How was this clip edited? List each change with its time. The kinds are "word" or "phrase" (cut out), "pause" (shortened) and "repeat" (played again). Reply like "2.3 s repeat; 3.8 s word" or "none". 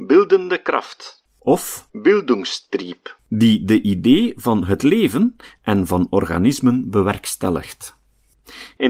none